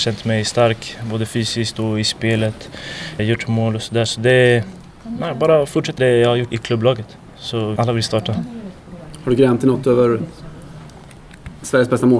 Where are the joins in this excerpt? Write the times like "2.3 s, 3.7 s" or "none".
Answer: 3.2 s, 6.0 s, 6.5 s, 7.8 s